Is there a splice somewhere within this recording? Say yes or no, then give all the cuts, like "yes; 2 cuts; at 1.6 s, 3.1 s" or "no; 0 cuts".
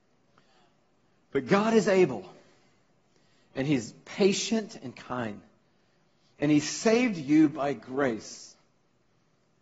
no; 0 cuts